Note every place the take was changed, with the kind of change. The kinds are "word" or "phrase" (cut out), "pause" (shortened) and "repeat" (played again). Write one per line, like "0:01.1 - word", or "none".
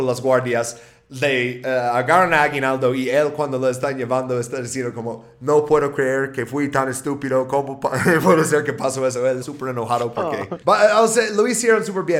0:09.4 - word
0:10.6 - pause